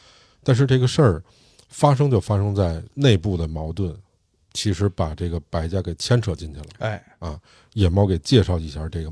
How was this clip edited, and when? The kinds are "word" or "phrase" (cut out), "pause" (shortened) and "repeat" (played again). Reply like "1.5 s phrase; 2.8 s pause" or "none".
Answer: none